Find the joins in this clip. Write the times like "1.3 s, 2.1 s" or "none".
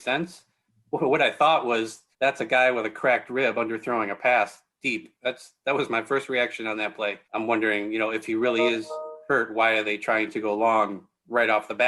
2.1 s, 7.2 s